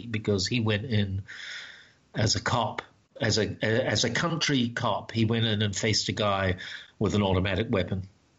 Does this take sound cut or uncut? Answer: uncut